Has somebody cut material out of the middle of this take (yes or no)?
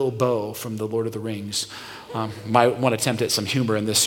no